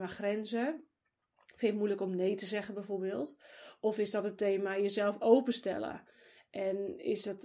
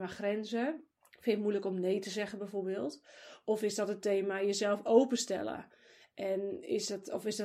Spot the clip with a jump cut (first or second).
second